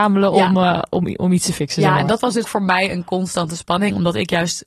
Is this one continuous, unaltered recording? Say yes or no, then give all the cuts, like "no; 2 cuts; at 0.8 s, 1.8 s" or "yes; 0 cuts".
no; 1 cut; at 2.4 s